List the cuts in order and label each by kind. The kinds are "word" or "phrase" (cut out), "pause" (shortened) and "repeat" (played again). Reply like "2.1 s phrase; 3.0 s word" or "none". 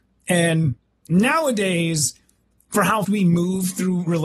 3.0 s word